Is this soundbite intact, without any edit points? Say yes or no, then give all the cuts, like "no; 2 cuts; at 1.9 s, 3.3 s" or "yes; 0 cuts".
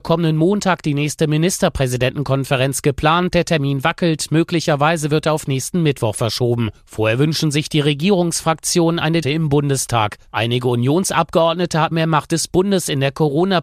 no; 2 cuts; at 9.2 s, 11.9 s